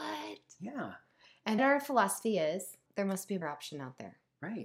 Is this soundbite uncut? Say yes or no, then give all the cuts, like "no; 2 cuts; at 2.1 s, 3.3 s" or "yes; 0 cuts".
no; 3 cuts; at 1.6 s, 2.9 s, 3.4 s